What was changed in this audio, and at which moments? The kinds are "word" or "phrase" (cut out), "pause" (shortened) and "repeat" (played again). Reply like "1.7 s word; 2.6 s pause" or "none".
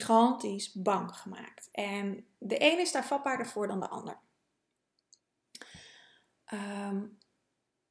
none

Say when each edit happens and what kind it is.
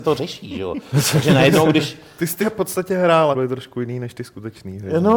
2.4 s word; 3.3 s word

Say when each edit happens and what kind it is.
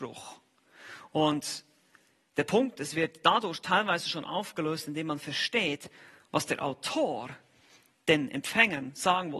none

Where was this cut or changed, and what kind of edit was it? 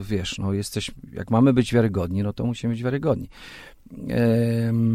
none

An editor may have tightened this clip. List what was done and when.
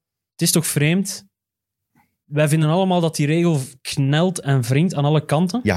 none

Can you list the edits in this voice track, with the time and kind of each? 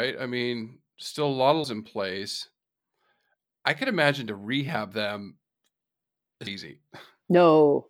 1.6 s word; 4.3 s word; 6.5 s word

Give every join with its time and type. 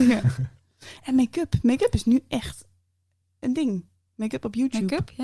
3.4 s word

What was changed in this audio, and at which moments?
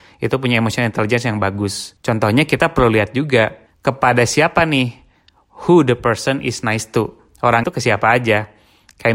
2.0 s pause; 3.7 s pause; 7.6 s phrase

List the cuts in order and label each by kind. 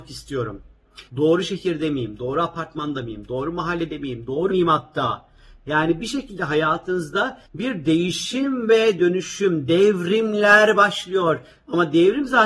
1.1 s pause; 4.5 s word; 7.5 s pause

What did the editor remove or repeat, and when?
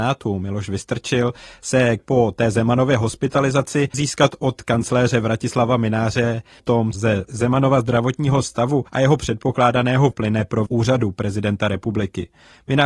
2.0 s word; 3.9 s word; 6.6 s phrase; 6.9 s word; 8.9 s pause; 10.1 s word; 10.7 s word

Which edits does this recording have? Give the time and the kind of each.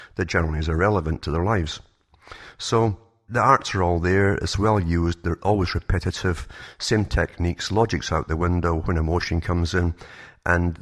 none

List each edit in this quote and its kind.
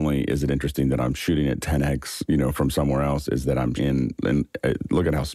3.8 s word

